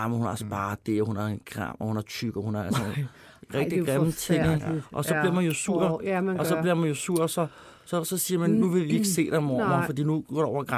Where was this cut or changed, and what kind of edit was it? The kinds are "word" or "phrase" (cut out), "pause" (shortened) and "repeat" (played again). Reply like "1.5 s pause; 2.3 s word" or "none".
none